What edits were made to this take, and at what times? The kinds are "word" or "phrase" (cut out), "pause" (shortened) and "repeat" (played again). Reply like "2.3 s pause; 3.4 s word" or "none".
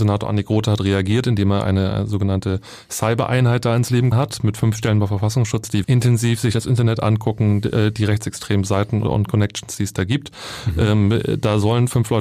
4.1 s word; 5.8 s word; 9.0 s word